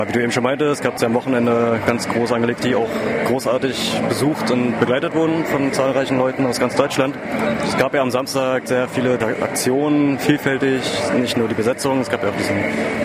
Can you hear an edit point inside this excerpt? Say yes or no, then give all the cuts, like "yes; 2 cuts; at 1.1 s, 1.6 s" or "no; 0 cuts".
yes; 2 cuts; at 2.6 s, 9.2 s